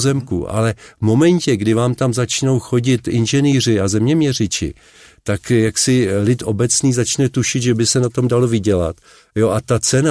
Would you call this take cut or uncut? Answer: uncut